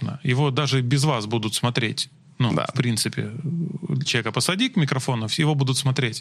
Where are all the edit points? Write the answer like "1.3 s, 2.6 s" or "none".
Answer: 4.1 s